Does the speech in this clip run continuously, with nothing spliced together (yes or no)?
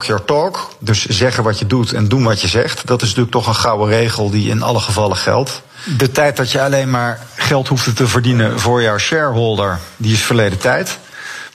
yes